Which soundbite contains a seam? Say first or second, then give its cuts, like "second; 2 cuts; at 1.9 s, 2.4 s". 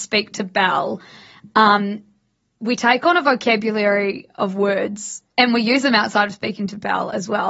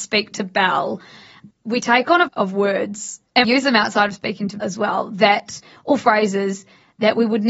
second; 4 cuts; at 1.5 s, 2.3 s, 3.4 s, 4.6 s